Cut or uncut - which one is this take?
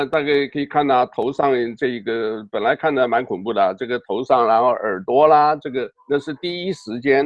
cut